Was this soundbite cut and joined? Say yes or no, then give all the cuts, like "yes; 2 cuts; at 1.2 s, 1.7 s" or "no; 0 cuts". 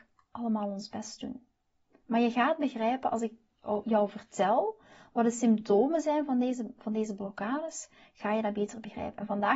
no; 0 cuts